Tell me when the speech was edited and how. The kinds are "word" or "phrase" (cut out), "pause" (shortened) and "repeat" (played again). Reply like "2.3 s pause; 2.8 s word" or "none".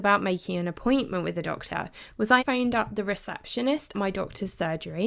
2.4 s word; 3.9 s word